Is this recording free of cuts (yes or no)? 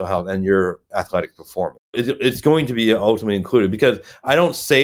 no